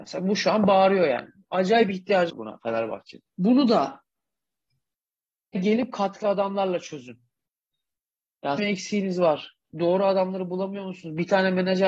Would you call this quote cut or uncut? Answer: cut